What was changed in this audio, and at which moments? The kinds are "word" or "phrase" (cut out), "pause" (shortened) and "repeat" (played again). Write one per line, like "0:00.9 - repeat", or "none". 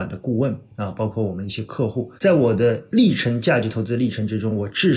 0:02.2 - pause